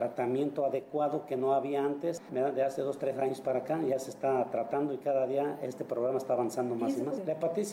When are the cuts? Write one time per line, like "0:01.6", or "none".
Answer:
none